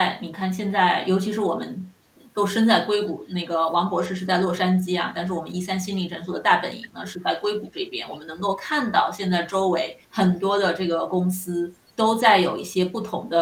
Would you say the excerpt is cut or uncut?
cut